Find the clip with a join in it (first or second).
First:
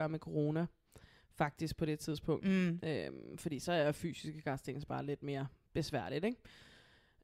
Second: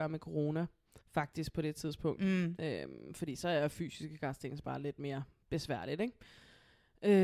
second